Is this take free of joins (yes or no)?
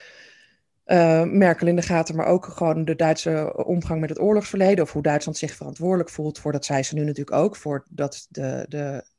yes